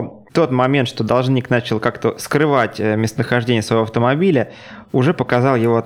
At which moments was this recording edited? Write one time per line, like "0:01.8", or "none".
none